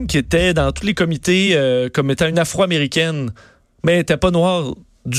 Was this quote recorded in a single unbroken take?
yes; 0 cuts

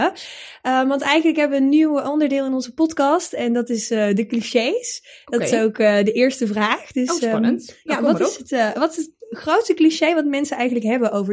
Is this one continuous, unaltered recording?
yes; 0 cuts

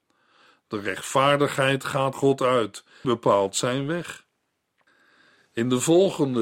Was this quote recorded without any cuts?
no; 2 cuts; at 2.1 s, 3.0 s

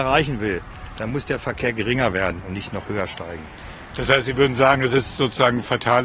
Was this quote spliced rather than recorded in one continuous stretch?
no; 0 cuts

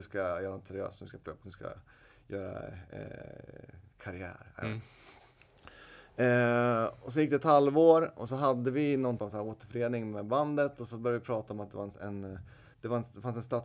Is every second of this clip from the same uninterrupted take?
no; 4 cuts; at 1.4 s, 3.9 s, 9.2 s, 12.7 s

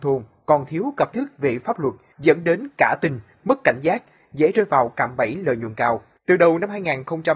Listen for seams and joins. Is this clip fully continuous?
no; 1 cut; at 1.1 s

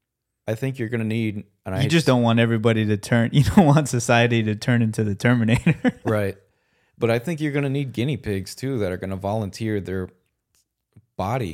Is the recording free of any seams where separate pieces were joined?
yes; 0 cuts

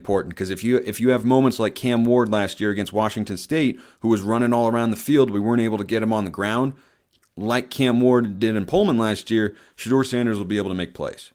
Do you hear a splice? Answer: no; 0 cuts

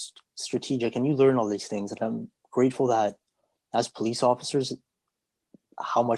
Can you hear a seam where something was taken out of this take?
no; 0 cuts

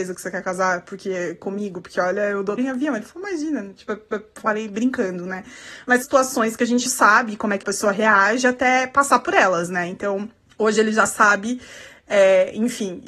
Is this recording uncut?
no; 6 cuts; at 2.6 s, 4.1 s, 6.0 s, 6.9 s, 7.6 s, 10.5 s

